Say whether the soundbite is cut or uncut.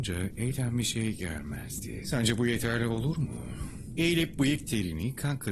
uncut